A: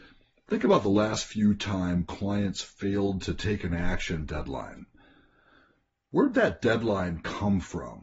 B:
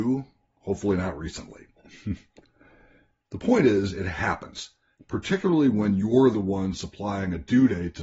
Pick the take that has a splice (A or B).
A